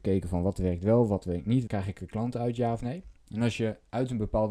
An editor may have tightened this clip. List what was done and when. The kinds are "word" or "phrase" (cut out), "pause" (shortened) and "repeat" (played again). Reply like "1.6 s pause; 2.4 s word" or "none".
1.7 s word